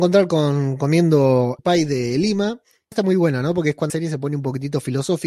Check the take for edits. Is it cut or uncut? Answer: cut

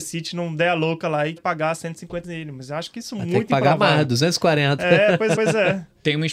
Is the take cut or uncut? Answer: cut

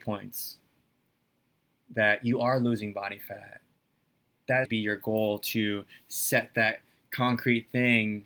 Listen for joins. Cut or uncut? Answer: cut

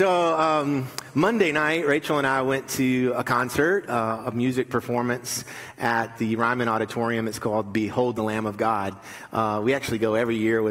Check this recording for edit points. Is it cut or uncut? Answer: uncut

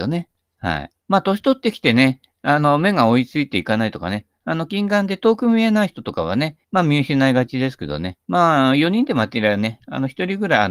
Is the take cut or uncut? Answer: cut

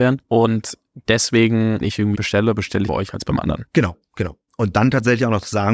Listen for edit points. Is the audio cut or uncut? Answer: cut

